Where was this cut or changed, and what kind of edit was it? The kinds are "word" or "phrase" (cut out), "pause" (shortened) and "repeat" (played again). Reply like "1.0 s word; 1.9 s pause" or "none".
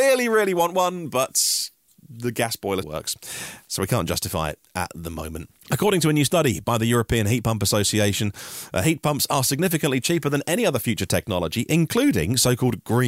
2.8 s word; 5.6 s pause